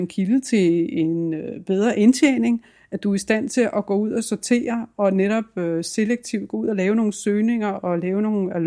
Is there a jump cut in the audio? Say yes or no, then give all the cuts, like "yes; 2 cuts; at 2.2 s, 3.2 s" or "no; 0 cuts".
no; 0 cuts